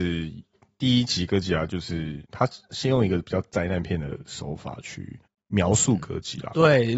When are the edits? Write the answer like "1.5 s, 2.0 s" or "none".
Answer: 2.2 s, 5.3 s